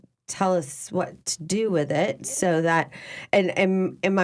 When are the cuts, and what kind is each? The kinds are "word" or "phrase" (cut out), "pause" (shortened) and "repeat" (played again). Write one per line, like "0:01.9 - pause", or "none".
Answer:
none